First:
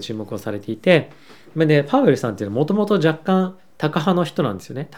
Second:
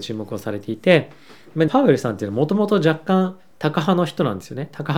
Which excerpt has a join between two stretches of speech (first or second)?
second